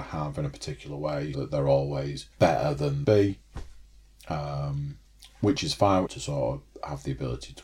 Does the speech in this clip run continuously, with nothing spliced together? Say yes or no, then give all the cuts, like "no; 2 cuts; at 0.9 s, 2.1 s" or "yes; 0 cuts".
no; 5 cuts; at 1.3 s, 2.3 s, 3.0 s, 5.0 s, 6.1 s